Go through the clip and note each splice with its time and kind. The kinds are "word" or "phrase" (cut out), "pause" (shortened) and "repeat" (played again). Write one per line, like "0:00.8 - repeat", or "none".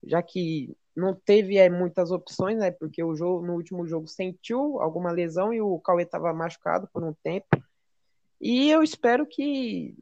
none